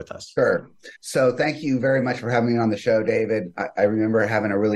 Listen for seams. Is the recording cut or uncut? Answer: cut